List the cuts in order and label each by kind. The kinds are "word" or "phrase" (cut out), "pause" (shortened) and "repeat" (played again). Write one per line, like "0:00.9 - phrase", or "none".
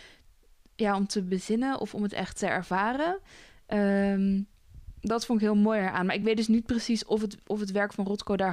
none